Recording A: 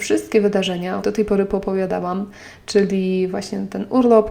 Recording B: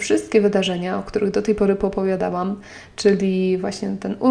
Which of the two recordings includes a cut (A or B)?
A